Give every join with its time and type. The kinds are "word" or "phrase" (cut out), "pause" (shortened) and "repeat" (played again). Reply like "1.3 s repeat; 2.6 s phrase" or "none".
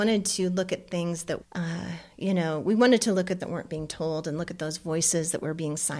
1.4 s word; 3.4 s phrase